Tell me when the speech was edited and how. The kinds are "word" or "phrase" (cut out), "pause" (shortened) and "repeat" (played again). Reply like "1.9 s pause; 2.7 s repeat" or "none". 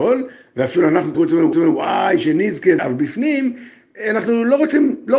1.1 s word; 1.5 s repeat; 2.8 s word